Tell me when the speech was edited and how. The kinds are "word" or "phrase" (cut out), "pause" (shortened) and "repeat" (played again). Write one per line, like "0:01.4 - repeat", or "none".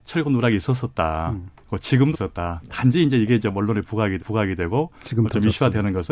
0:02.1 - word
0:04.2 - repeat